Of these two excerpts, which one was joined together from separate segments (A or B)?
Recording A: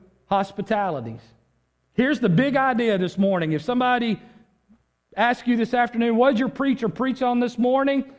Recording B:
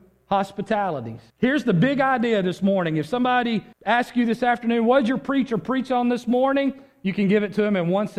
B